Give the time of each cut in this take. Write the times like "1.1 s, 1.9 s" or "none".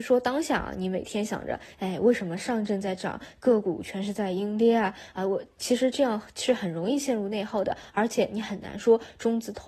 none